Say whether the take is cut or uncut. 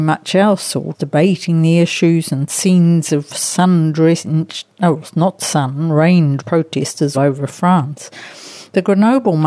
cut